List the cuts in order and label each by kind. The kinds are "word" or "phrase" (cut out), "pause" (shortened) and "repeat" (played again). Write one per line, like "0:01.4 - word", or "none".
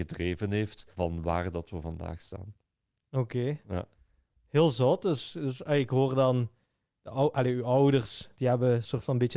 0:00.9 - pause